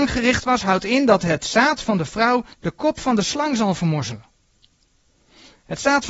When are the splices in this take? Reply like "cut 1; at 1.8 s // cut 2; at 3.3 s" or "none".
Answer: cut 1; at 2.5 s

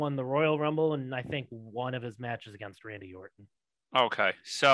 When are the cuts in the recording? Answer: none

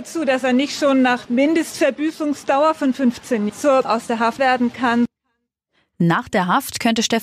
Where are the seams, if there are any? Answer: cut 1; at 1.2 s // cut 2; at 3.5 s // cut 3; at 3.8 s // cut 4; at 4.4 s

